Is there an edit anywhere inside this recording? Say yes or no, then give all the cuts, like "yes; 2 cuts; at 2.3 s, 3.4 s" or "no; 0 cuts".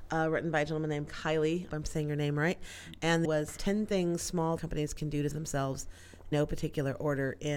yes; 7 cuts; at 1.1 s, 1.7 s, 3.2 s, 3.6 s, 4.6 s, 5.3 s, 6.3 s